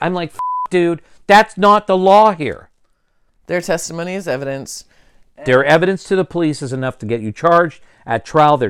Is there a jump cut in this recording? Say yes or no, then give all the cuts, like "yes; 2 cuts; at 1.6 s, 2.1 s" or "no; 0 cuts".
no; 0 cuts